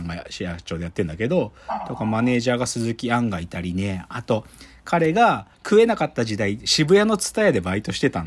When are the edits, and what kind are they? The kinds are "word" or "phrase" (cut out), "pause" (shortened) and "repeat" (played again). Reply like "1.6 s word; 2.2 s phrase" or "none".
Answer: 5.5 s pause